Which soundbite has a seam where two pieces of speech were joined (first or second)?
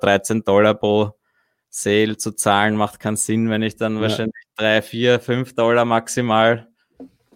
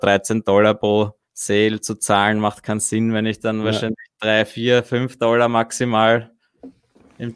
second